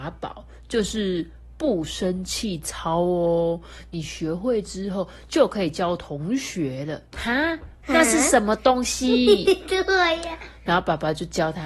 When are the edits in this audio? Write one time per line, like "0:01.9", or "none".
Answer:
0:07.1
0:07.8